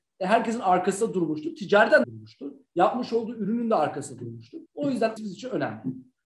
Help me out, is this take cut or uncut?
cut